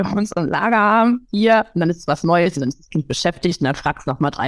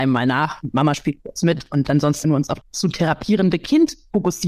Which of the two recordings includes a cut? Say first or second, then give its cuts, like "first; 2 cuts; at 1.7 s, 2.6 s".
second; 2 cuts; at 2.2 s, 2.6 s